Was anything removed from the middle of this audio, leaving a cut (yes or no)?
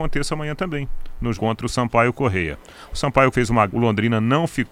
yes